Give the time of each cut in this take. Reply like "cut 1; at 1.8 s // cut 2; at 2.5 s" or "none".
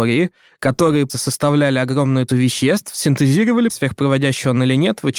cut 1; at 1.1 s // cut 2; at 2.3 s // cut 3; at 3.7 s